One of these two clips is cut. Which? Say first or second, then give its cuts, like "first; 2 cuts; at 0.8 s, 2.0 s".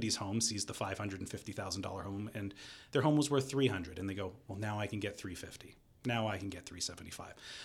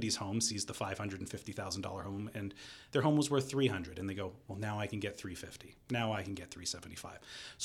second; 1 cut; at 5.8 s